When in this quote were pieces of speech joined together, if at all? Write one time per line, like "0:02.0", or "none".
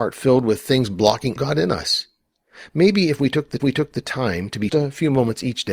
0:01.4
0:03.6
0:04.7